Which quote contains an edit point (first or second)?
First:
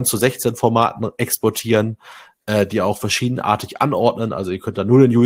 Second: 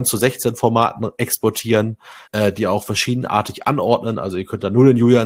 second